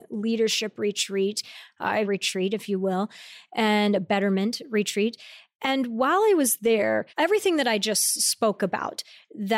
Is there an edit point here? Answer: yes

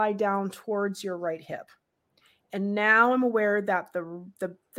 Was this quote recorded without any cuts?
yes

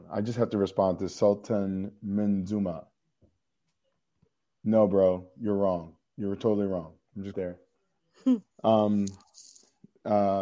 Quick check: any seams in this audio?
yes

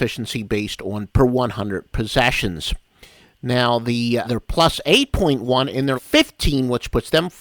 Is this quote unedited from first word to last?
no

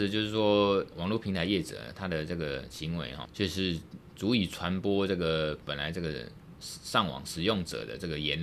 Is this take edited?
yes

